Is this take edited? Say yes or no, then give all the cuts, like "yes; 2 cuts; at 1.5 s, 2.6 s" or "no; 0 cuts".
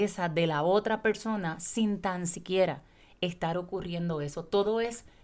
no; 0 cuts